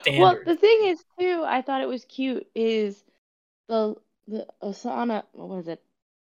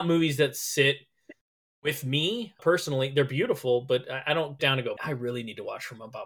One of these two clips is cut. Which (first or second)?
second